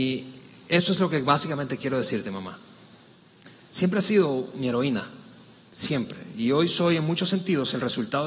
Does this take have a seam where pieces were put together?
no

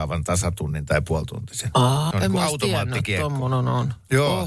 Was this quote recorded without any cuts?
no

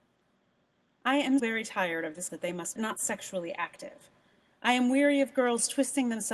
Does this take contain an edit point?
yes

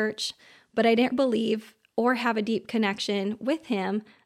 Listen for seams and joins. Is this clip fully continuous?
no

